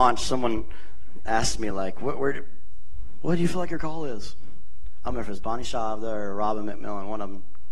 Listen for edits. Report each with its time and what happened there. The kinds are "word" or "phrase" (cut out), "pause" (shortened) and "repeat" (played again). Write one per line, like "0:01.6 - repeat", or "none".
none